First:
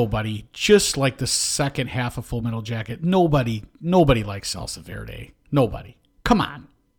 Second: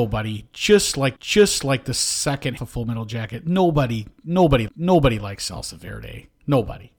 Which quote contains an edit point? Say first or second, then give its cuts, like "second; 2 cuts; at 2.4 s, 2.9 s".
second; 3 cuts; at 1.2 s, 2.6 s, 4.7 s